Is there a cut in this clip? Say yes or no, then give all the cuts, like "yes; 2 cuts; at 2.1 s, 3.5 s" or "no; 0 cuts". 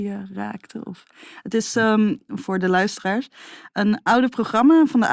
no; 0 cuts